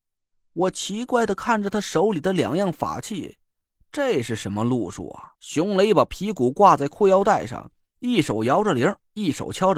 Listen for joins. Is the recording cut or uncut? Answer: cut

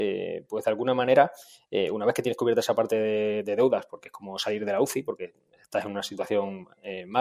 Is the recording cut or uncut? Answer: uncut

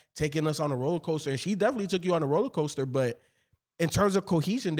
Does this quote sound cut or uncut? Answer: uncut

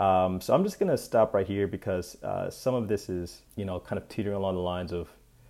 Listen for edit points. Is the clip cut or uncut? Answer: cut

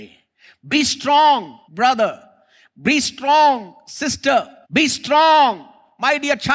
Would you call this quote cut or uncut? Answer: cut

